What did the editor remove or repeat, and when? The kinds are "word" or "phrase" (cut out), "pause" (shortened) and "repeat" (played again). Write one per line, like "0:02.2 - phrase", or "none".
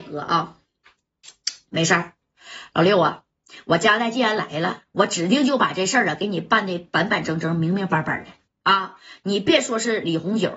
0:08.5 - pause